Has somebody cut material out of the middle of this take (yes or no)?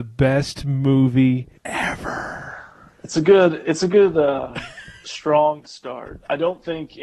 yes